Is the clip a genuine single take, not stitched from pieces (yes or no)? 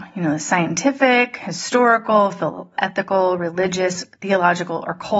no